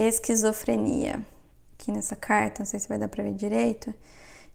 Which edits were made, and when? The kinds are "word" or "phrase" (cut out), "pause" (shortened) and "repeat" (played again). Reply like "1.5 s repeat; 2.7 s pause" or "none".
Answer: 1.5 s pause